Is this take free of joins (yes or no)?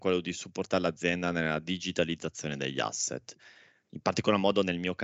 yes